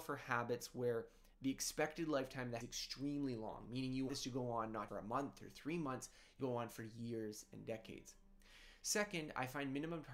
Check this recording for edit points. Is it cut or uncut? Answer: cut